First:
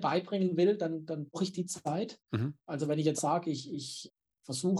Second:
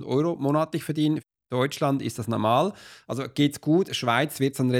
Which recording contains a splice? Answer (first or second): first